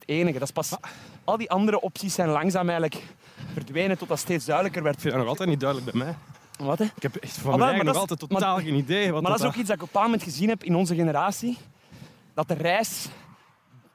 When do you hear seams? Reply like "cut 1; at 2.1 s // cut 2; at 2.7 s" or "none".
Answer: none